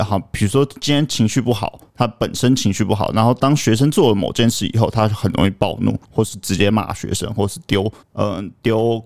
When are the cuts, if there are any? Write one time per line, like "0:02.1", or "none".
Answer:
0:01.9
0:06.0
0:08.0